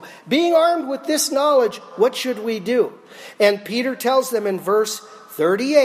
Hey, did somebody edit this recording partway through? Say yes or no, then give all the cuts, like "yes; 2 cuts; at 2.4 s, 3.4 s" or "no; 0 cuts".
no; 0 cuts